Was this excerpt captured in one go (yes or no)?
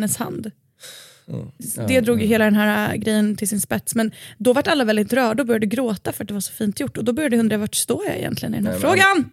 yes